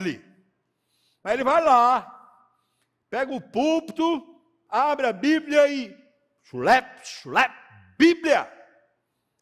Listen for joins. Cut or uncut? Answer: uncut